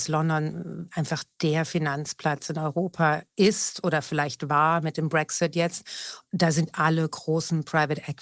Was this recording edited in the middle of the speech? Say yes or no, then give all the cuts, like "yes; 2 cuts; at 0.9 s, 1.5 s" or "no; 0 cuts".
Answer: no; 0 cuts